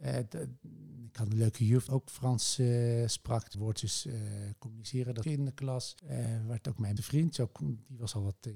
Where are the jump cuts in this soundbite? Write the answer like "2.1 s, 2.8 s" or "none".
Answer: 1.9 s, 3.5 s, 5.2 s, 6.0 s, 7.0 s